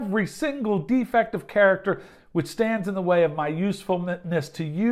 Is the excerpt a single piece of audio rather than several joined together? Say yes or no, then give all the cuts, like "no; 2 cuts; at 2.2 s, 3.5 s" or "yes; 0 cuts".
yes; 0 cuts